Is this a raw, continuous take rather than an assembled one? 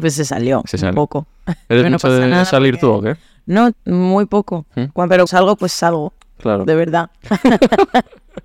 no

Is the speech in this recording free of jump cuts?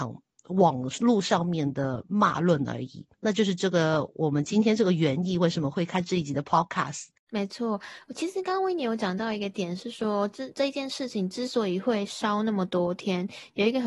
no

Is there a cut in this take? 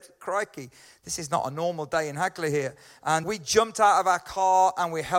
yes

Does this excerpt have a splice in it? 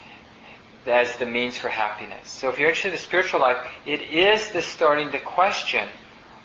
no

